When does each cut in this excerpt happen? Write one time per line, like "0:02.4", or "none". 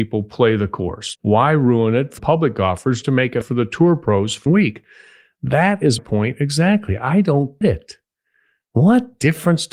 0:01.2
0:02.2
0:03.0
0:03.4
0:04.5
0:06.0
0:07.6